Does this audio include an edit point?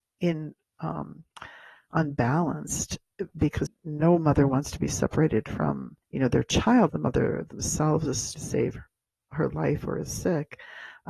yes; 4 cuts; at 3.7 s, 6.0 s, 6.9 s, 8.3 s

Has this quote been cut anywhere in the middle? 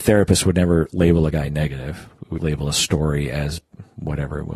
yes; 1 cut; at 2.4 s

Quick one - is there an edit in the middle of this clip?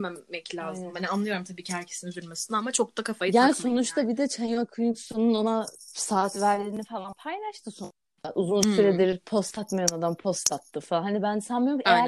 no; 0 cuts

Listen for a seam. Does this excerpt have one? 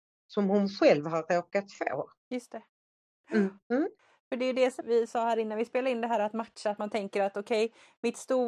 yes; 3 cuts; at 2.2 s, 3.6 s, 4.8 s

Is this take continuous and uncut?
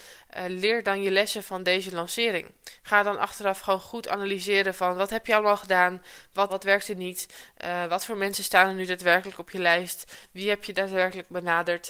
no; 1 cut; at 6.5 s

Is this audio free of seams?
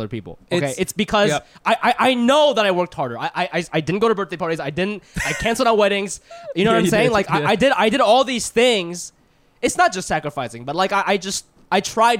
yes; 0 cuts

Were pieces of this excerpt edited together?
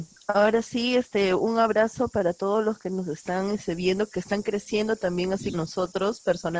yes; 1 cut; at 5.5 s

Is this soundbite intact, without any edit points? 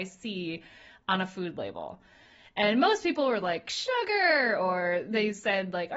yes; 0 cuts

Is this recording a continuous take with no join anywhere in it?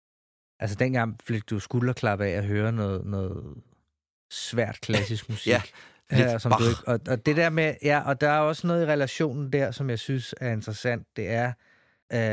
yes; 0 cuts

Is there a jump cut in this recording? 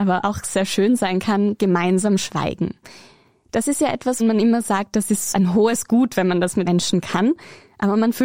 yes; 3 cuts; at 4.2 s, 5.3 s, 6.7 s

